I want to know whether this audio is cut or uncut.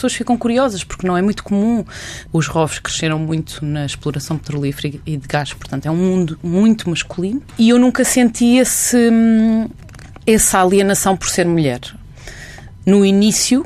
uncut